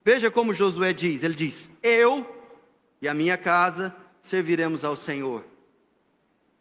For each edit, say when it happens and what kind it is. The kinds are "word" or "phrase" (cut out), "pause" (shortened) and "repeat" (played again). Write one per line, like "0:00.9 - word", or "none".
none

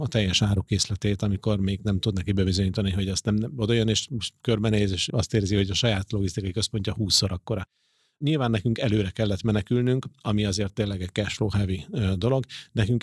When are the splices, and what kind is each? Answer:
none

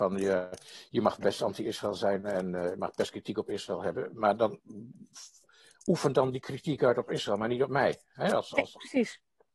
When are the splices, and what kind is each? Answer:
none

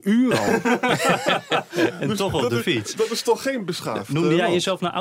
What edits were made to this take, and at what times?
none

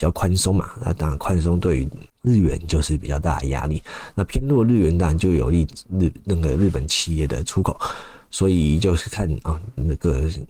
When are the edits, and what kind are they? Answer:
0:02.1 - pause

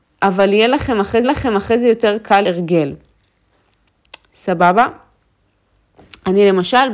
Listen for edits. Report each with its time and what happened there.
0:01.2 - repeat
0:02.4 - word

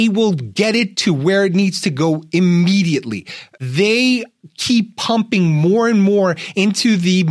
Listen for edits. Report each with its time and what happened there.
none

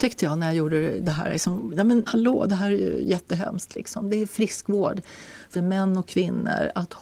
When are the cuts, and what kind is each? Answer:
0:02.1 - phrase
0:05.6 - word

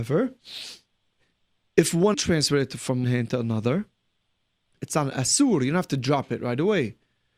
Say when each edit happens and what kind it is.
0:02.1 - word
0:03.0 - word
0:04.8 - word

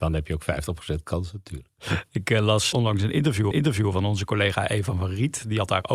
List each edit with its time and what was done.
0:02.7 - word
0:03.5 - repeat

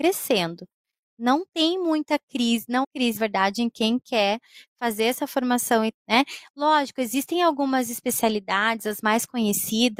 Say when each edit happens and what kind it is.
0:02.8 - word
0:03.2 - word
0:05.9 - word

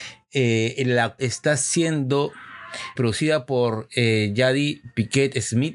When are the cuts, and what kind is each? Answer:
0:01.2 - word
0:03.0 - word

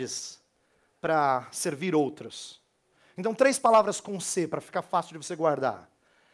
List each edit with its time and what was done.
none

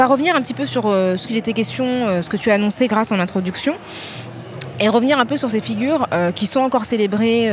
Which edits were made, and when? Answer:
0:01.2 - word

